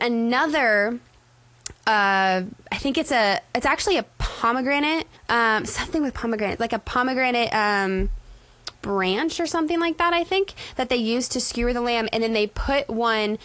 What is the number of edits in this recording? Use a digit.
2